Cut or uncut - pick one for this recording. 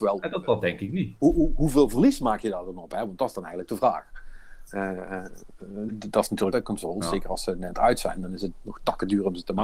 cut